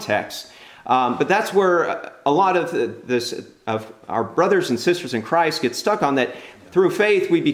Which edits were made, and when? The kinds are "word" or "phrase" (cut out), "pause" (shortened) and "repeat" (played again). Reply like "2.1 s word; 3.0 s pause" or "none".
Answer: none